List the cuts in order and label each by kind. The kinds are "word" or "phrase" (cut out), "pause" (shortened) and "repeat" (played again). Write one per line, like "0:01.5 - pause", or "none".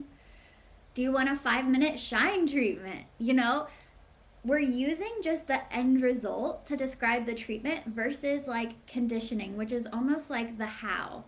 none